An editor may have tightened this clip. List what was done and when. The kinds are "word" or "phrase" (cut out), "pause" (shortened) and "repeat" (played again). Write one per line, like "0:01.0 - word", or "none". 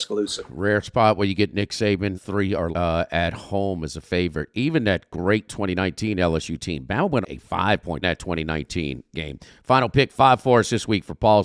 0:02.1 - word
0:02.7 - word
0:07.2 - word
0:08.0 - phrase